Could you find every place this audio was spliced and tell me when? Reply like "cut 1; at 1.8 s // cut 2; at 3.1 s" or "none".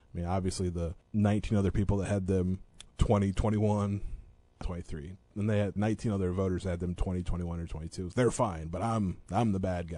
cut 1; at 1.0 s // cut 2; at 4.6 s // cut 3; at 5.8 s // cut 4; at 8.1 s